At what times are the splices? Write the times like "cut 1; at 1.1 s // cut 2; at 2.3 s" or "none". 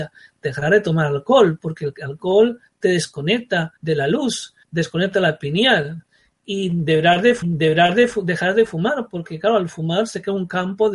cut 1; at 3.8 s // cut 2; at 4.6 s // cut 3; at 7.4 s